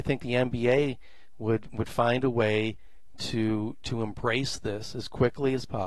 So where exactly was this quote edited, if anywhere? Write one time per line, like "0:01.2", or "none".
none